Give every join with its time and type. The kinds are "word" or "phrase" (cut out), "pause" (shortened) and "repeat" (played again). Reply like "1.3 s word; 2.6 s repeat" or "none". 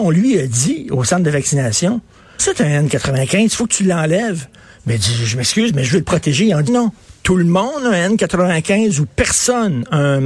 2.4 s word; 6.7 s word